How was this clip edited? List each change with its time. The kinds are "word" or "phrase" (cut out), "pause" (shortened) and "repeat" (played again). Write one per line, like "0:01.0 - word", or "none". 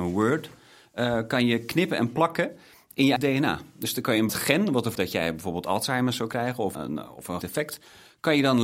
0:03.2 - word
0:04.3 - word
0:04.9 - word
0:06.7 - word
0:07.4 - word